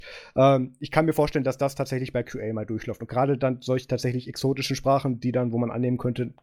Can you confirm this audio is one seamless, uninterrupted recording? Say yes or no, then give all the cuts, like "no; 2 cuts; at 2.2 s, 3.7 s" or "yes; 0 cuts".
yes; 0 cuts